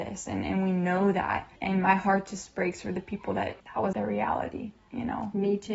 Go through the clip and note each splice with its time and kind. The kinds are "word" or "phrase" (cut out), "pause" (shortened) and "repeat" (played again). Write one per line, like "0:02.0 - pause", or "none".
0:01.6 - pause
0:03.6 - pause
0:03.9 - word

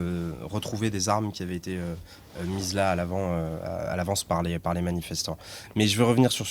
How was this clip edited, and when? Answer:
none

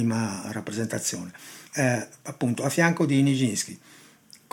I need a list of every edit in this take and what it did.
0:01.7 - pause

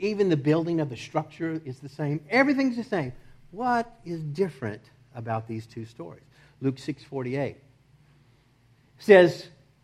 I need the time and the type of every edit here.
none

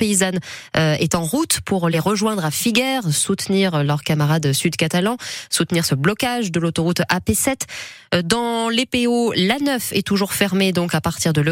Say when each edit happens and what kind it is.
none

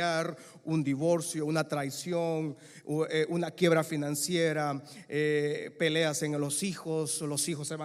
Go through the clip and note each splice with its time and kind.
none

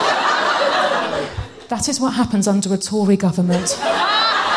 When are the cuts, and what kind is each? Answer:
none

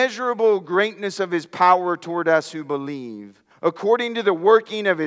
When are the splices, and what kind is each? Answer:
0:03.5 - pause

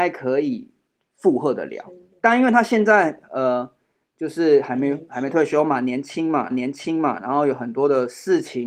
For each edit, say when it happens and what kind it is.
0:06.5 - repeat

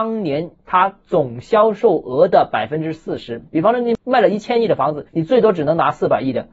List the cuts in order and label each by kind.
0:05.1 - pause

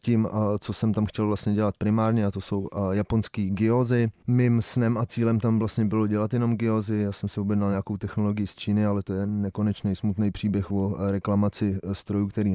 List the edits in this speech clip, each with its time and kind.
none

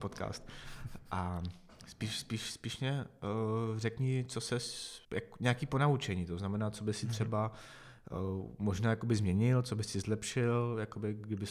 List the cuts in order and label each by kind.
0:05.0 - pause

